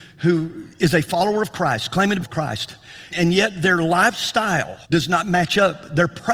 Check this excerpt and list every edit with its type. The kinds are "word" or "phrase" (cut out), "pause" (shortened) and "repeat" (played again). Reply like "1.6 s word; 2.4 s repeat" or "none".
2.2 s phrase; 3.1 s word; 4.8 s pause